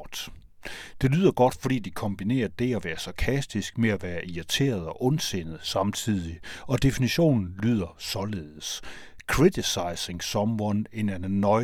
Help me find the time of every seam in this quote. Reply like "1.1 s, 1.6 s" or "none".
none